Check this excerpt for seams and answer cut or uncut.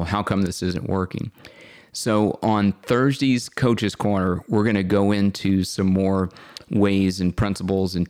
uncut